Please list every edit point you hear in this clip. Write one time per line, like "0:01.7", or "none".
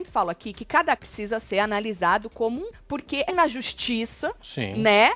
0:01.0
0:02.7
0:03.3